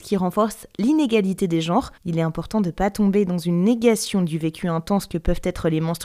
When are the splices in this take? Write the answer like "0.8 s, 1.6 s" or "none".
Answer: 2.0 s